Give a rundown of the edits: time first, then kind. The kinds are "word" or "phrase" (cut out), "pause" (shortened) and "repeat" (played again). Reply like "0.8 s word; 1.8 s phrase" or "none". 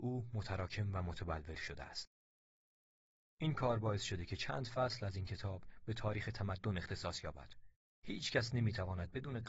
none

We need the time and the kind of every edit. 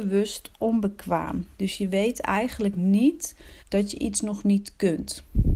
1.5 s pause; 3.6 s pause

